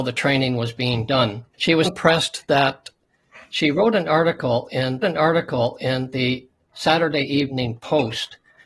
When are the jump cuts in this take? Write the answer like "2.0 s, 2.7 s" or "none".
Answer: 1.5 s, 1.8 s, 5.0 s